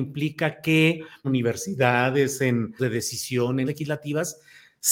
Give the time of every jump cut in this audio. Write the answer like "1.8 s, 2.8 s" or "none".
1.2 s, 2.8 s, 3.7 s